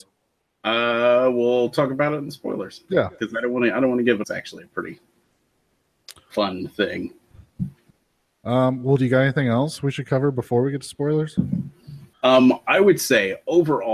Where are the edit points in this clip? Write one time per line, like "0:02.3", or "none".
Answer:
0:04.2
0:08.0
0:12.1